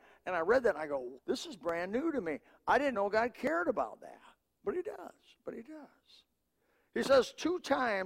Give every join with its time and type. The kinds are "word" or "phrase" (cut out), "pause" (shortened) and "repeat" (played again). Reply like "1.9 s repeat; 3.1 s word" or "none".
1.2 s word; 2.9 s word